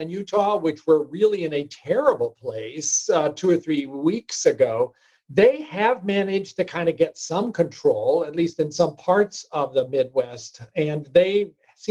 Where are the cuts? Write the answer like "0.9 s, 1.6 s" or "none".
none